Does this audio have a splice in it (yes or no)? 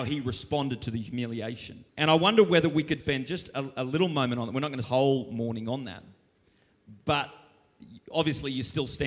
yes